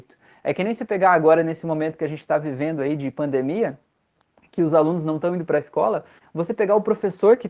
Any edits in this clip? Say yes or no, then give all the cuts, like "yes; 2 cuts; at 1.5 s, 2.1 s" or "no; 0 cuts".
no; 0 cuts